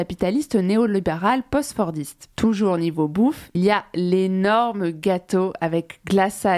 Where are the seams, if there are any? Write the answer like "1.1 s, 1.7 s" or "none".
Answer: 2.3 s, 3.5 s